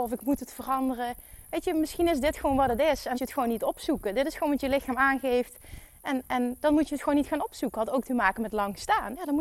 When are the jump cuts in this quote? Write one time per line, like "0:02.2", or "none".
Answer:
0:03.1